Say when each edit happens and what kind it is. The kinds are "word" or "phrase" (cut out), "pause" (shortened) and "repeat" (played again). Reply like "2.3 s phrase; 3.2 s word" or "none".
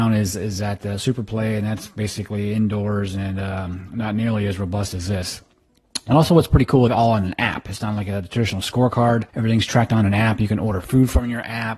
6.9 s phrase; 9.3 s pause